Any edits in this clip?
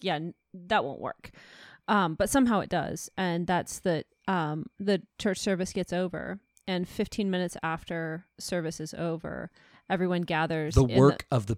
no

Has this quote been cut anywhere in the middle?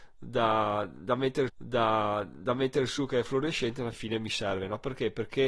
yes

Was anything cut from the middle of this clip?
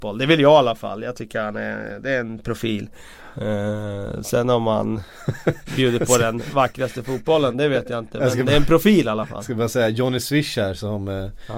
no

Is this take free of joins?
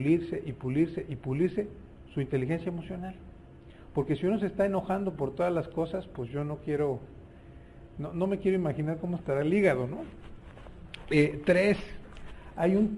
yes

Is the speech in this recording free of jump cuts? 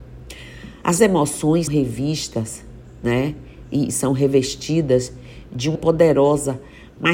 no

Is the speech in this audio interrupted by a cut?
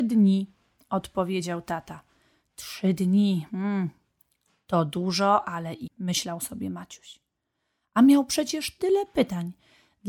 yes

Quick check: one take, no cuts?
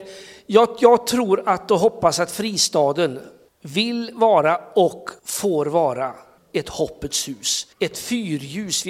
no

